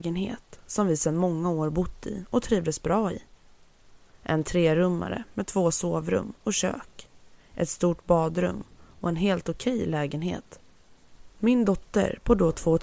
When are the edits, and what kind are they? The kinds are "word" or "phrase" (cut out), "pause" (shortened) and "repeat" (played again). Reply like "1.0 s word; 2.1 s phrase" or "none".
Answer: none